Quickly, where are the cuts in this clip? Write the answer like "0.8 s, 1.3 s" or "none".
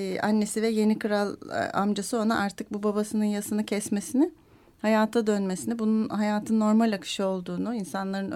none